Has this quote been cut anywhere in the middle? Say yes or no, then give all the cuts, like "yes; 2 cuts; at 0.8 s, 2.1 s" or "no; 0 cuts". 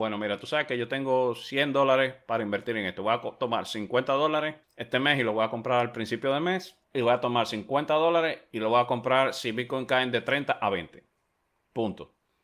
yes; 2 cuts; at 4.6 s, 6.8 s